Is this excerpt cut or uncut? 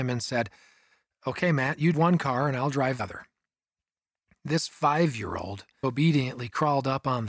cut